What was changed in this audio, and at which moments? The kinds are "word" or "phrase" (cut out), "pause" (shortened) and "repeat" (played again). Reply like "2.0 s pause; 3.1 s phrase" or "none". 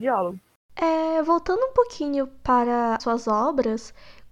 3.0 s word